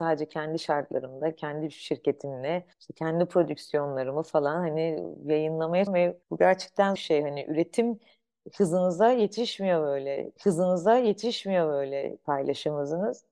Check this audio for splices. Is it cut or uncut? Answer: cut